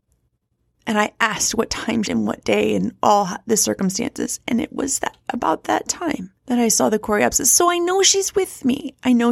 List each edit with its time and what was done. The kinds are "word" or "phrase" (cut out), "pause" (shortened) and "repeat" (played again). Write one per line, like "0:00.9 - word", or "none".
0:02.0 - phrase
0:06.4 - pause

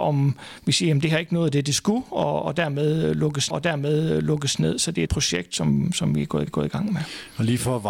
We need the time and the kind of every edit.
0:03.5 - repeat
0:05.1 - phrase
0:06.5 - repeat

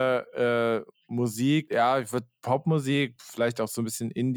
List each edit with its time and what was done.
none

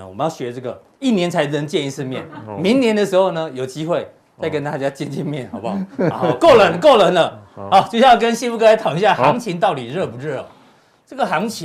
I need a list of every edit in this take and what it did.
none

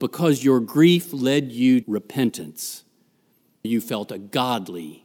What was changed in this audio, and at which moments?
0:01.8 - word
0:03.6 - word

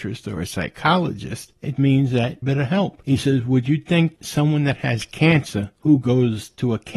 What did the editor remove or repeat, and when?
0:01.8 - word
0:02.4 - phrase

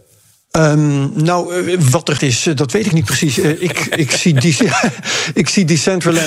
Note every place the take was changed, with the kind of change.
0:02.2 - word
0:02.9 - word

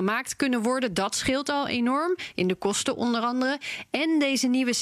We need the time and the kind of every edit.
none

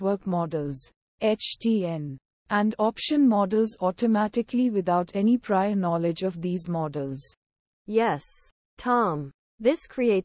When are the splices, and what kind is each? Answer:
none

